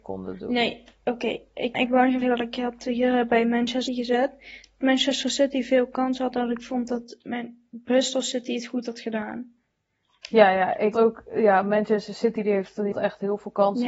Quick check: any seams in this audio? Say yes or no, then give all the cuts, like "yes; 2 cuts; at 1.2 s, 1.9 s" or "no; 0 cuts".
yes; 6 cuts; at 1.7 s, 2.2 s, 3.9 s, 6.3 s, 10.9 s, 12.9 s